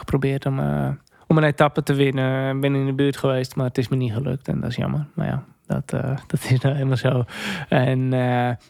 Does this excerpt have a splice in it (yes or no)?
yes